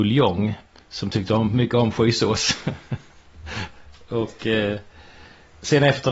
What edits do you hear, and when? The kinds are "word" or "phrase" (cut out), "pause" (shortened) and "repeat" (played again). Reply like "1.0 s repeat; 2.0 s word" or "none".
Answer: none